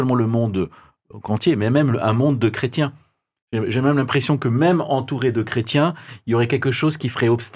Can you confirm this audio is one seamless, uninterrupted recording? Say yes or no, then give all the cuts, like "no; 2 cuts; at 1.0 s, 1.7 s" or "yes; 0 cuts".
yes; 0 cuts